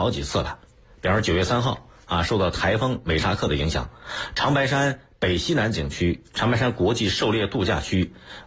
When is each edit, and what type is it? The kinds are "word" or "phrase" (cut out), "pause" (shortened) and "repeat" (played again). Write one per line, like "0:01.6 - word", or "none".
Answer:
none